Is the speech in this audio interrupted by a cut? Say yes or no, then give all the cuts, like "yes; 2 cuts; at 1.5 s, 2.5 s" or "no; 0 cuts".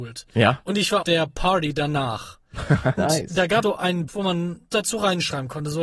yes; 5 cuts; at 1.0 s, 3.0 s, 3.6 s, 4.1 s, 4.7 s